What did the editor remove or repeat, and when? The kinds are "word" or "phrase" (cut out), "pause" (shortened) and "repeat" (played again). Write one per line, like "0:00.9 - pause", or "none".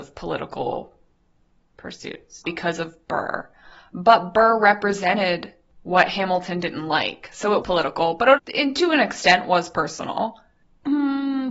0:02.4 - word
0:07.6 - word
0:08.4 - word

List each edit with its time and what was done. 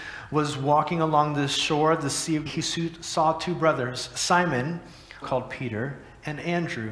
0:02.5 - word
0:05.2 - word

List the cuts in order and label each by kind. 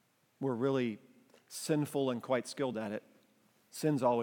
none

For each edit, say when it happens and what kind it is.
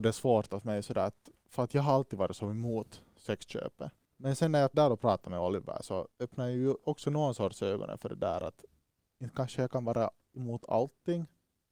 0:04.7 - word
0:06.1 - pause

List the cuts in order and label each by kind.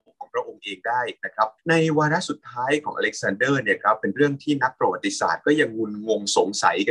0:01.6 - pause

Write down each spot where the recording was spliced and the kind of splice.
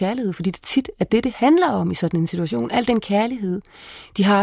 none

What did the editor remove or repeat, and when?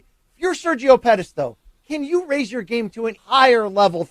0:03.2 - word

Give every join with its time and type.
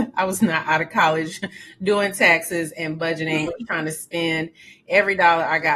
0:03.5 - word

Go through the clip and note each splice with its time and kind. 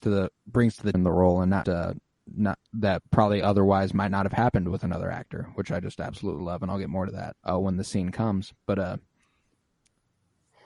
0:00.9 - phrase
0:01.6 - word
0:07.4 - pause

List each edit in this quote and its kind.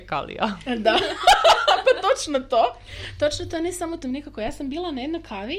0:04.0 - phrase

